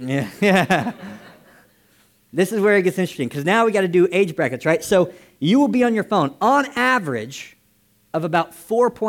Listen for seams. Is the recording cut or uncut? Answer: uncut